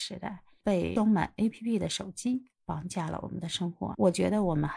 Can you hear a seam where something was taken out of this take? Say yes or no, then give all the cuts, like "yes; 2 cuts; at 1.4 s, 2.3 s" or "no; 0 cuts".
no; 0 cuts